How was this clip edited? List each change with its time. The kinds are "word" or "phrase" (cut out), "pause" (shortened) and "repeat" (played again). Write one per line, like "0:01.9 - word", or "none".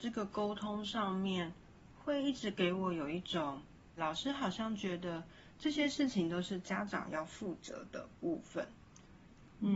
0:04.0 - word